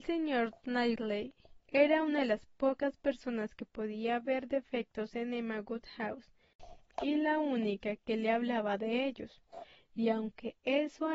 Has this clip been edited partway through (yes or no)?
no